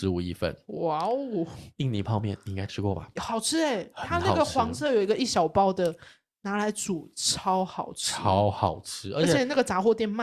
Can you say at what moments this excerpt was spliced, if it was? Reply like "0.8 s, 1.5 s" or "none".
none